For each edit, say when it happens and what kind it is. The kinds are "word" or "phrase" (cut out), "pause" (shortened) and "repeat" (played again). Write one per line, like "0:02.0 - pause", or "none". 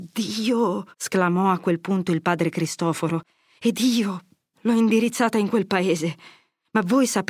0:00.9 - pause
0:04.5 - word